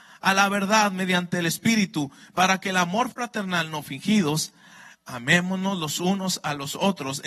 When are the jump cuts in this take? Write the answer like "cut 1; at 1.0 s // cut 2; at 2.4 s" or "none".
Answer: none